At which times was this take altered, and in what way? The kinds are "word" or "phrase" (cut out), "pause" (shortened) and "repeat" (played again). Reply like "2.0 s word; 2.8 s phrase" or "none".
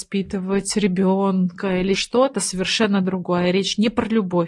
1.9 s word; 2.3 s word